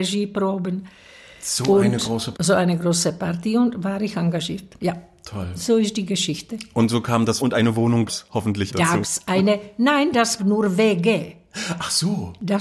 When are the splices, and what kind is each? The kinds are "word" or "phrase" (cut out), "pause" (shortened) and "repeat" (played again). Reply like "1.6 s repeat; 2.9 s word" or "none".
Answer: 2.3 s word; 7.4 s word; 8.1 s word; 8.7 s word; 9.0 s word; 10.4 s word